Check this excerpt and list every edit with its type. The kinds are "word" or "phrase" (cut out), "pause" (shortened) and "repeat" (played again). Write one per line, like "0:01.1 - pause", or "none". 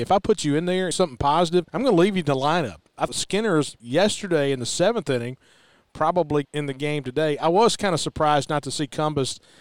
0:00.9 - phrase
0:01.7 - pause
0:03.1 - word
0:03.8 - word
0:06.4 - phrase

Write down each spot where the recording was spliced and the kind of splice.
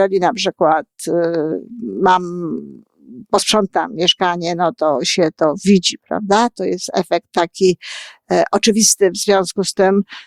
none

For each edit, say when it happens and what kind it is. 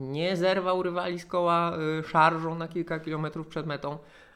none

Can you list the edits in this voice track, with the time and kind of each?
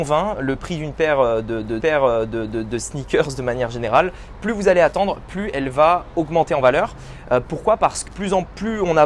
0:01.8 - repeat
0:08.1 - phrase

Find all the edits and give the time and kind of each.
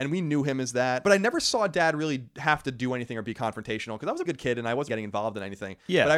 0:04.3 - word
0:04.9 - word

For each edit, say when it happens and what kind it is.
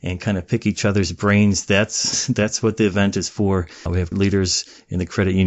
0:04.1 - word

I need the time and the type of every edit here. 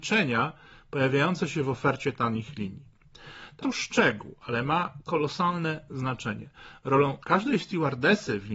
0:03.6 - word

